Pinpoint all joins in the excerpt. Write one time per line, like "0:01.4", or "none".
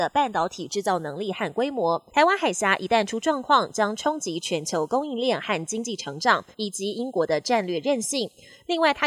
0:02.1
0:06.5